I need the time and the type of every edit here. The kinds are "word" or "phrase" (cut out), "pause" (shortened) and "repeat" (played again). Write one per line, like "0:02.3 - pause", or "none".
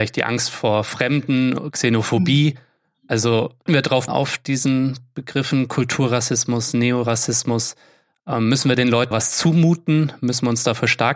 0:03.7 - word
0:04.1 - word
0:09.1 - word